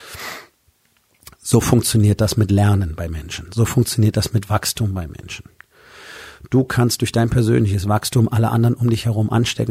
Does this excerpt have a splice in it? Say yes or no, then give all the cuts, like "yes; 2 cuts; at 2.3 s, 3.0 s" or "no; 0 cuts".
no; 0 cuts